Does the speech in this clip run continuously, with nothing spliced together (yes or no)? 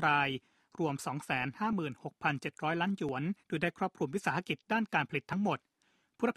no